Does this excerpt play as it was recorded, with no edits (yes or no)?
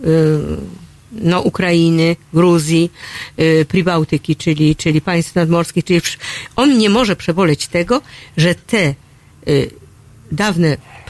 yes